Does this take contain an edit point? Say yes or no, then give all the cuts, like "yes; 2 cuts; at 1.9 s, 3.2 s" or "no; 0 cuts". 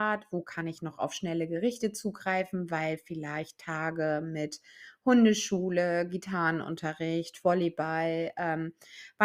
no; 0 cuts